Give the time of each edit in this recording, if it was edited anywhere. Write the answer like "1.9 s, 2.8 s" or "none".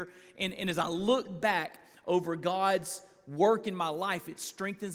none